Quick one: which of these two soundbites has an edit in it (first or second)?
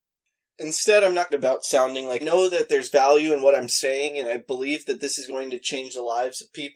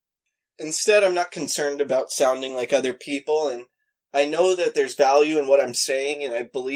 first